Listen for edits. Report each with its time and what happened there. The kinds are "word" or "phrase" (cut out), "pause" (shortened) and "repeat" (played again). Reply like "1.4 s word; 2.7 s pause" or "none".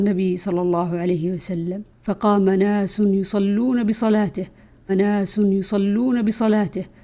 1.9 s pause; 4.9 s repeat